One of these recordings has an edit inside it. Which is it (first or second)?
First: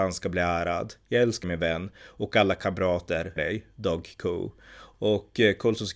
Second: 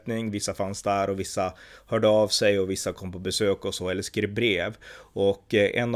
first